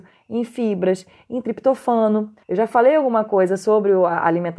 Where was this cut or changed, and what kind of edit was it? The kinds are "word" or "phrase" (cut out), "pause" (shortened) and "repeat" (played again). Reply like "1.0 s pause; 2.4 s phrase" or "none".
2.4 s pause